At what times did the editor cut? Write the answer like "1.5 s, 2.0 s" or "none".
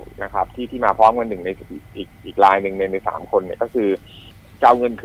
none